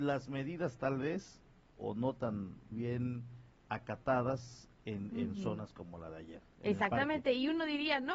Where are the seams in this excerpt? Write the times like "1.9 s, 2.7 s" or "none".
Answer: 1.8 s, 2.7 s